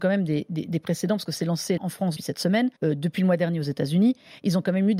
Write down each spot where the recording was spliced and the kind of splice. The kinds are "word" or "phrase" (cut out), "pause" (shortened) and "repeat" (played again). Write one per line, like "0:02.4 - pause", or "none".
0:01.8 - word
0:02.2 - word
0:02.8 - pause